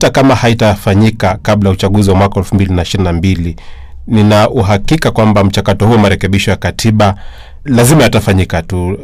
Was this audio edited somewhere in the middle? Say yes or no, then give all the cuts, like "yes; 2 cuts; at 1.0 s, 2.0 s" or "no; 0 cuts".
yes; 1 cut; at 7.7 s